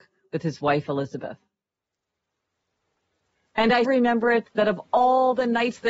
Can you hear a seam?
yes; 1 cut; at 3.8 s

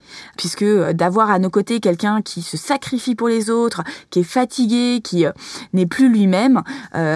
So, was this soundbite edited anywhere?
no; 0 cuts

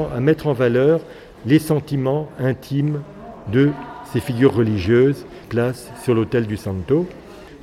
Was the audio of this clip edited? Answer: yes; 1 cut; at 5.4 s

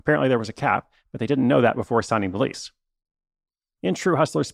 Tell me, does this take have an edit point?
no; 0 cuts

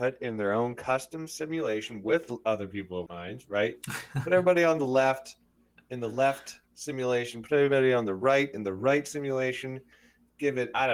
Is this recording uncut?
no; 1 cut; at 3.1 s

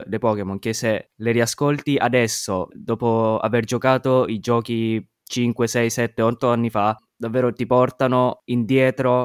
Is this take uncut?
yes; 0 cuts

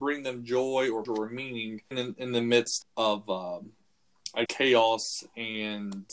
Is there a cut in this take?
yes; 4 cuts; at 1.0 s, 1.9 s, 2.8 s, 4.5 s

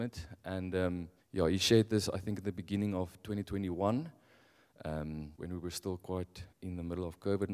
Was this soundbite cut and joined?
yes; 3 cuts; at 1.2 s, 5.3 s, 6.5 s

